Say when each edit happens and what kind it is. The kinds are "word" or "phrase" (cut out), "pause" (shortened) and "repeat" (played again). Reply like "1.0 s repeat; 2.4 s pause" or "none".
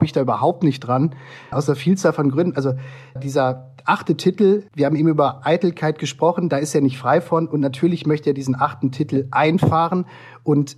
1.5 s word; 3.2 s word; 4.7 s word